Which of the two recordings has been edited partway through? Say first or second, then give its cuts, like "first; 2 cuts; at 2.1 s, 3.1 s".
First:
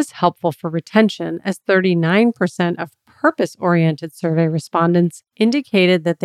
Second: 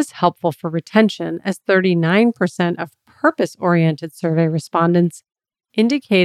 first; 1 cut; at 5.3 s